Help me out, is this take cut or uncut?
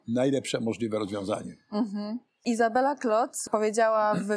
uncut